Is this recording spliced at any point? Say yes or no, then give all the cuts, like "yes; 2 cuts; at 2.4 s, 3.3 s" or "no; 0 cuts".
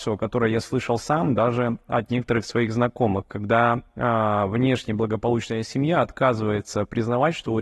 no; 0 cuts